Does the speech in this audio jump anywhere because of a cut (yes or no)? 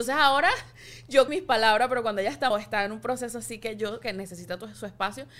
yes